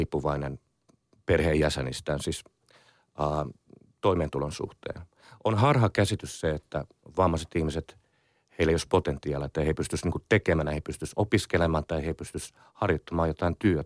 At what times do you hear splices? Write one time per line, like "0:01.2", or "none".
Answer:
none